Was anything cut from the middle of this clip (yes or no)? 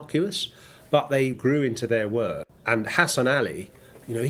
yes